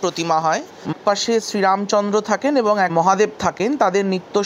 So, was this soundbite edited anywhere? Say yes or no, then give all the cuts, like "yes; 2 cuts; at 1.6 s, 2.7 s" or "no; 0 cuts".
yes; 2 cuts; at 0.9 s, 2.9 s